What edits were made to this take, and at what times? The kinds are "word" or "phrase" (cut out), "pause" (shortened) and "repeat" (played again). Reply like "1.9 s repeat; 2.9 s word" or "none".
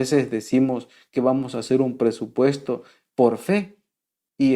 none